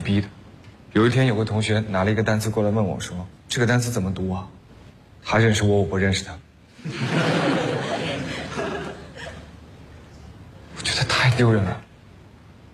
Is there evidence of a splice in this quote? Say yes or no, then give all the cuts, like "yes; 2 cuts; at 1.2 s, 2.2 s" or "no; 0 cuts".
yes; 1 cut; at 4.6 s